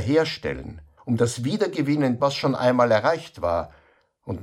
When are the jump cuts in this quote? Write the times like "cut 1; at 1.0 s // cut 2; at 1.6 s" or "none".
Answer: cut 1; at 1.0 s // cut 2; at 2.2 s

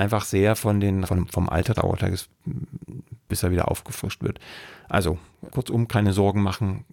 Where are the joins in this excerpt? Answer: cut 1; at 1.0 s // cut 2; at 1.7 s // cut 3; at 5.5 s

